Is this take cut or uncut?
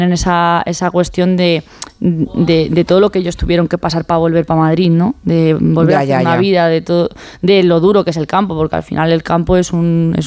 uncut